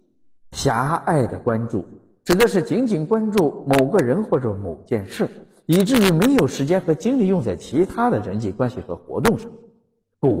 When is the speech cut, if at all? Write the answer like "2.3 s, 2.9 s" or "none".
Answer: none